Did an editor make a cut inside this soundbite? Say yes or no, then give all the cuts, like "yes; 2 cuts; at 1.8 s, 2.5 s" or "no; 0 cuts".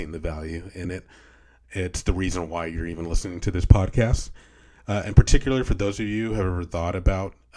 no; 0 cuts